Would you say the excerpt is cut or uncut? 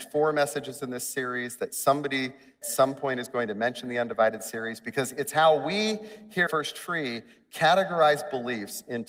cut